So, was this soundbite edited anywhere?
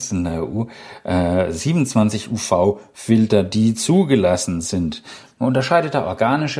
no; 0 cuts

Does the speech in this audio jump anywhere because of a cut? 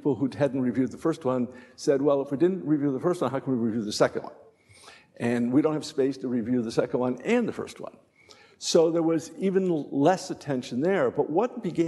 no; 0 cuts

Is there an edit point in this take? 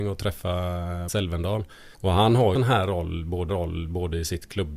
yes; 4 cuts; at 1.1 s, 1.9 s, 2.5 s, 3.5 s

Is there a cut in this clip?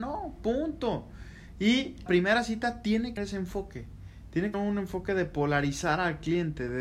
yes; 3 cuts; at 2.1 s, 3.2 s, 4.5 s

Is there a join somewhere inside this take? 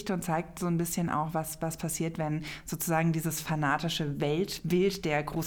no; 0 cuts

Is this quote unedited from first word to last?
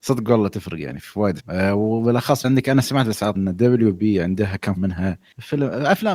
no; 4 cuts; at 1.4 s, 2.4 s, 3.3 s, 4.8 s

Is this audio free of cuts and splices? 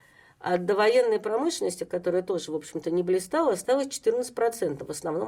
yes; 0 cuts

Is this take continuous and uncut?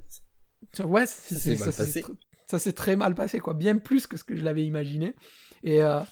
yes; 0 cuts

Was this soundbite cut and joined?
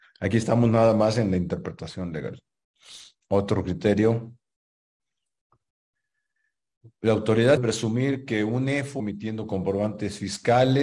yes; 3 cuts; at 3.2 s, 7.6 s, 9.0 s

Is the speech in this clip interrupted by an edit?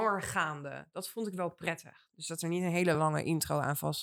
no; 0 cuts

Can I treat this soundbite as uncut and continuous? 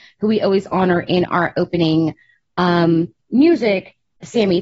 yes; 0 cuts

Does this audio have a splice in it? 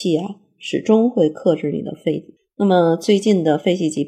no; 0 cuts

